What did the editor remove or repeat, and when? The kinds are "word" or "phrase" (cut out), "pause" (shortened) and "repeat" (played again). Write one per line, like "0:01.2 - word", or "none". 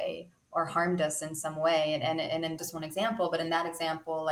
0:02.6 - word